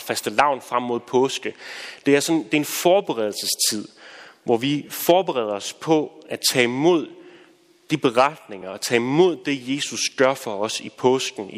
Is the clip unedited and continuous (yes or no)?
yes